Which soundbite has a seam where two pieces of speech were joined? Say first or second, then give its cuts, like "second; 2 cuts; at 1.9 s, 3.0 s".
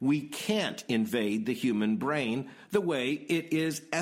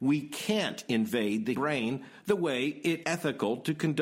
second; 2 cuts; at 1.5 s, 3.0 s